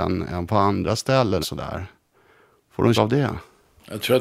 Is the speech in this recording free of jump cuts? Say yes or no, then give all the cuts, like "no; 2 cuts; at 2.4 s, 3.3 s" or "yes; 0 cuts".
no; 2 cuts; at 1.4 s, 2.9 s